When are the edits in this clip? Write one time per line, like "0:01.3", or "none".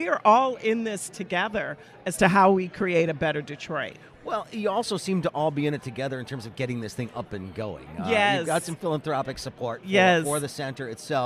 none